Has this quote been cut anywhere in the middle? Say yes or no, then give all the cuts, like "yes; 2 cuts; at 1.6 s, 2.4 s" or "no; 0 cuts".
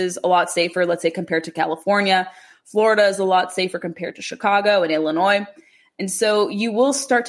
no; 0 cuts